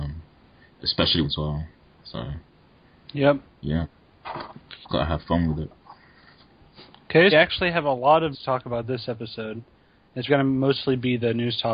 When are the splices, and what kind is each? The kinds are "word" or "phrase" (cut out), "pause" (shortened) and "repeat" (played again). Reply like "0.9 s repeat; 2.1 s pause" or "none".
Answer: 1.2 s phrase; 4.9 s word; 7.3 s phrase; 8.3 s word; 10.3 s word